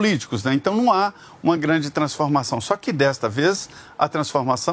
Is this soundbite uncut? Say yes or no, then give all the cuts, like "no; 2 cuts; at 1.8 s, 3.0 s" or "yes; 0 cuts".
yes; 0 cuts